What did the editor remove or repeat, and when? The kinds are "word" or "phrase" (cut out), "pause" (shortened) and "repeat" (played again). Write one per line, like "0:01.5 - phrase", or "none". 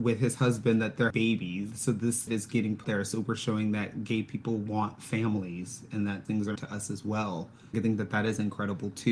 0:01.1 - word
0:01.7 - word
0:02.3 - word
0:02.8 - word
0:06.2 - word
0:06.6 - word
0:07.7 - word